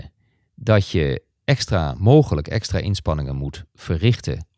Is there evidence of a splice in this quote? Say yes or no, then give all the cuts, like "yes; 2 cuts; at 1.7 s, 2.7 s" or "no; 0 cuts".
no; 0 cuts